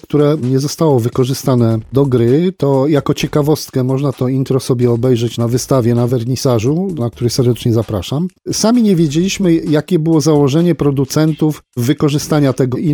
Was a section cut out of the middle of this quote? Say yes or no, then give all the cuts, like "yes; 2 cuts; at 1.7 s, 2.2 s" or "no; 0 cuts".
no; 0 cuts